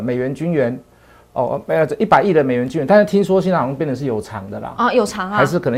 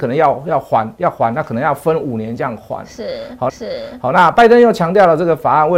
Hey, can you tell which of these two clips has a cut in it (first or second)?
second